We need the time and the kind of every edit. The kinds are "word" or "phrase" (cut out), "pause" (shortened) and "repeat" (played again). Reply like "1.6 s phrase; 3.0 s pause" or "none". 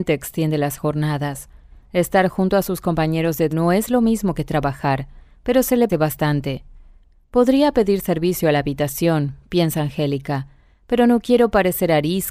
3.5 s word; 5.9 s word

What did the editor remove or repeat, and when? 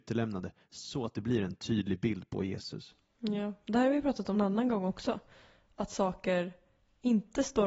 4.3 s word

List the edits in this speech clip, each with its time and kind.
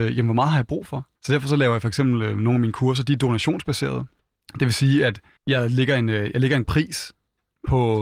1.2 s pause; 4.2 s pause; 5.4 s pause; 6.6 s word

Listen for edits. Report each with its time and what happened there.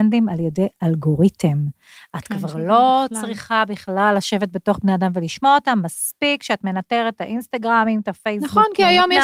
none

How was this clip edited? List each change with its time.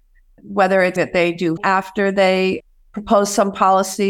1.0 s word; 1.6 s word

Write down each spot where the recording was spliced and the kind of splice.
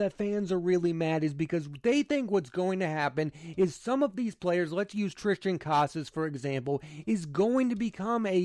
none

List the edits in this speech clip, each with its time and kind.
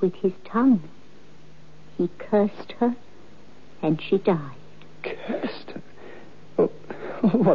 none

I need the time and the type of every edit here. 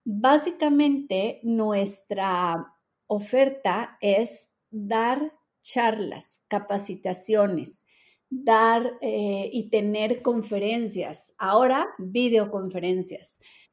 none

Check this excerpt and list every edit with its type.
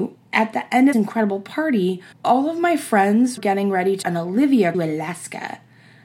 0.9 s word; 2.1 s pause; 3.4 s word; 4.0 s word; 4.7 s phrase

